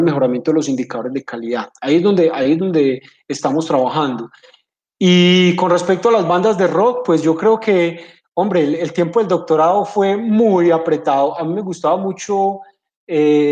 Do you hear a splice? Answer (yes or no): no